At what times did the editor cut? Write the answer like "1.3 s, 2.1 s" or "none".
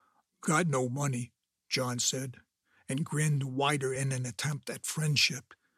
none